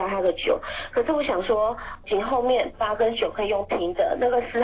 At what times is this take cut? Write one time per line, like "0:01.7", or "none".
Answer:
0:02.0